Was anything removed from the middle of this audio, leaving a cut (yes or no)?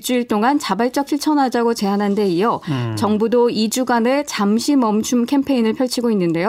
yes